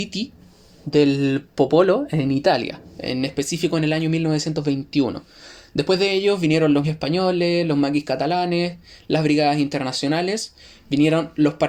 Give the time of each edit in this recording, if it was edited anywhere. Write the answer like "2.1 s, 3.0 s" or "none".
6.8 s